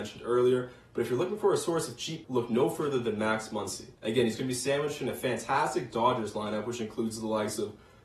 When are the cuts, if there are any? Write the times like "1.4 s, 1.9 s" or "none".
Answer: 2.2 s, 4.0 s

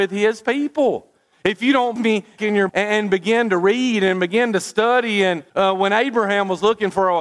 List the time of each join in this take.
2.0 s, 2.4 s, 2.7 s, 5.5 s

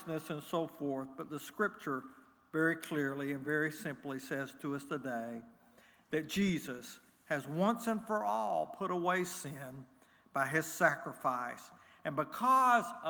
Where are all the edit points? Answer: none

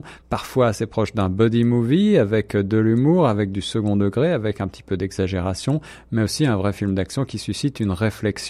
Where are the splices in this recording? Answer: none

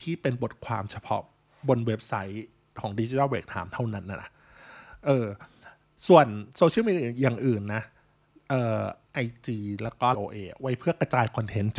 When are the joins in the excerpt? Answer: 9.1 s, 10.1 s

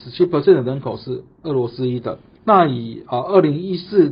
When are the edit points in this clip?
none

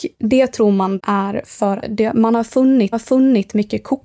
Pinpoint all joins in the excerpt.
1.0 s, 1.8 s, 2.9 s

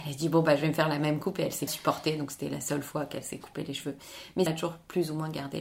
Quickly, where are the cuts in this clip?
1.7 s, 4.5 s

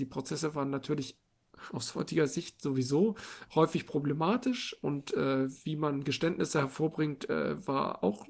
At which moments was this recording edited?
3.5 s

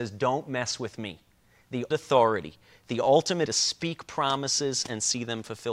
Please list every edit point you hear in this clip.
1.9 s, 3.5 s

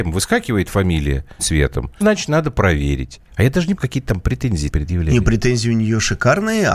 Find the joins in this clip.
1.4 s, 2.0 s, 3.3 s, 3.8 s, 4.7 s

